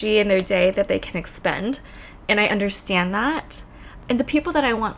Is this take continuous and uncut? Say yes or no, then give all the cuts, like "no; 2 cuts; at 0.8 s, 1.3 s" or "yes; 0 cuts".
yes; 0 cuts